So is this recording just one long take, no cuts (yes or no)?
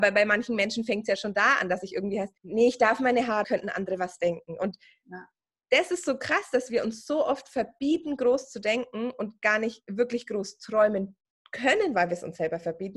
no